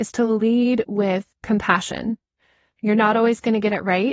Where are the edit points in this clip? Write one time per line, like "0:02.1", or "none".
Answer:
0:01.3

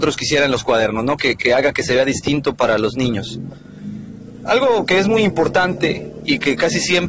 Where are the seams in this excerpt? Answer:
none

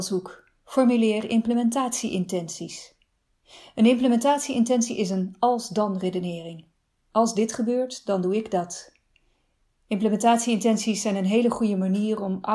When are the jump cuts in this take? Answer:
none

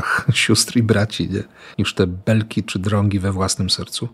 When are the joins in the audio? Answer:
0:01.7

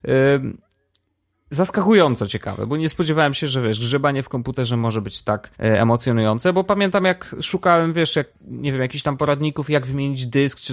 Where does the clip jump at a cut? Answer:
0:05.5
0:08.3

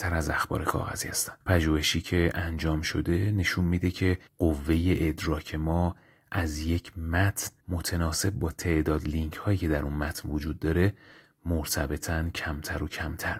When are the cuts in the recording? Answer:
0:01.4
0:04.3
0:07.6

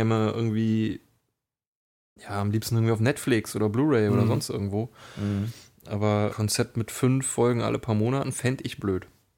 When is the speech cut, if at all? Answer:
0:06.3

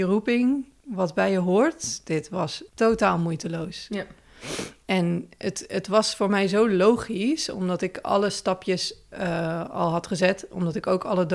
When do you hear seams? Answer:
0:02.7

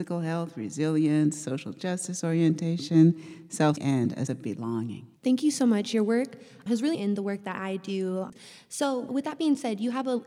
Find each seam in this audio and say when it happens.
0:03.8
0:04.3
0:05.2
0:06.9

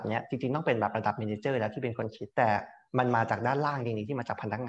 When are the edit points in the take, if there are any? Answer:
0:02.3

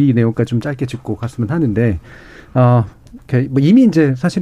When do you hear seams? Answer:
none

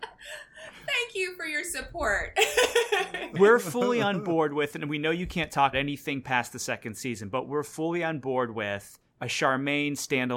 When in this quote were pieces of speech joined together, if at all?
0:05.7
0:09.1

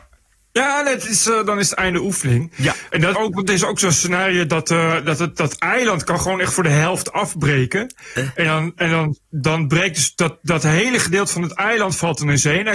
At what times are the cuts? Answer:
0:03.1

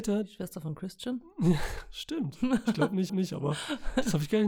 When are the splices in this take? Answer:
0:03.1

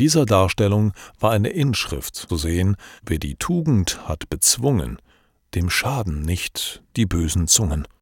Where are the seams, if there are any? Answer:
0:02.3
0:03.0

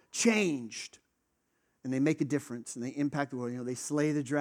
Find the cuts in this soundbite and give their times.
none

